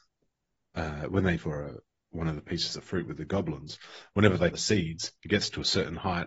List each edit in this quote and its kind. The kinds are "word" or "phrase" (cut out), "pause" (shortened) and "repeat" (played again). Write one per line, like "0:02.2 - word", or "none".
0:01.4 - word
0:04.5 - word